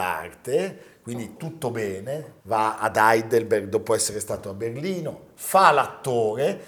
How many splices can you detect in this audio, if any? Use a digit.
2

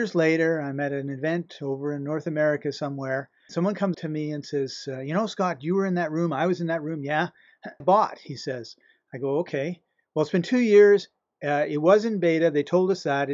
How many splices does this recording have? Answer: 3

